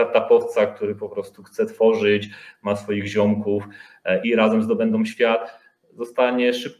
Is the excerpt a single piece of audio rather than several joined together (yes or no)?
no